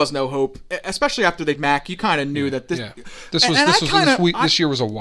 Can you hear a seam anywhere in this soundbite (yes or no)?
yes